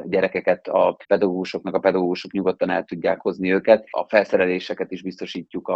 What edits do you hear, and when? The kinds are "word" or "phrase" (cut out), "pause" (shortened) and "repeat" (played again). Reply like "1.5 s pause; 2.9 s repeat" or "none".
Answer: 1.0 s pause